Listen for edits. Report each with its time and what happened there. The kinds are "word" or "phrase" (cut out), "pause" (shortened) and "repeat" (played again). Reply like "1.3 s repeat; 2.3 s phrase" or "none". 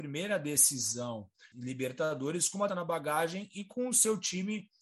1.5 s word; 2.7 s word